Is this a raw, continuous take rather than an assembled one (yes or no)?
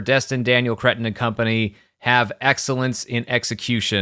yes